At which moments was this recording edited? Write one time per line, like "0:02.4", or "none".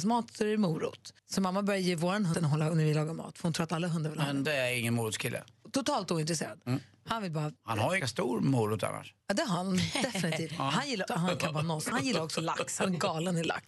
0:01.2
0:02.3
0:04.4
0:07.6
0:08.0
0:09.2
0:11.1
0:11.9